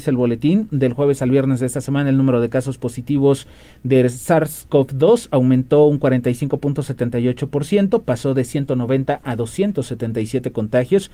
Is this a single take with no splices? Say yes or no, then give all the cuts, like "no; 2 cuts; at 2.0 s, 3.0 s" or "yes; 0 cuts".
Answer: yes; 0 cuts